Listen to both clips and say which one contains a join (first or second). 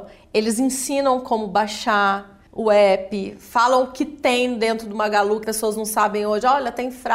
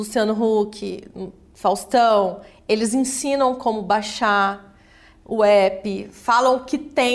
first